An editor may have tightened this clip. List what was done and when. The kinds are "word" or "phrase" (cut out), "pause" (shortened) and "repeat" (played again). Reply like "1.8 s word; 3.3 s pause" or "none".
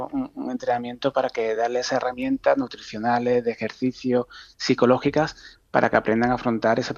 none